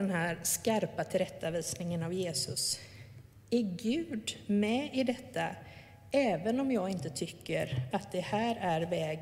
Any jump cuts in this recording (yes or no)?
no